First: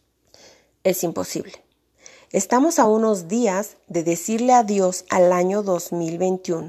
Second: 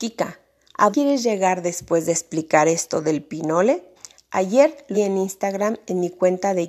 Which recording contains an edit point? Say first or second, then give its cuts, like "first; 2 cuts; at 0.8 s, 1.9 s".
second; 3 cuts; at 0.9 s, 4.0 s, 4.9 s